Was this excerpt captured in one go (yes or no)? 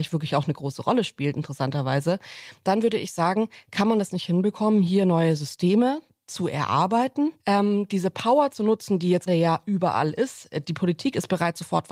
no